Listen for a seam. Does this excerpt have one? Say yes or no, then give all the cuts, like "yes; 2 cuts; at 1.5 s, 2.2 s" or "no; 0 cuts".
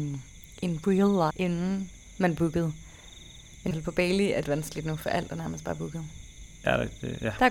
yes; 3 cuts; at 1.3 s, 3.7 s, 4.4 s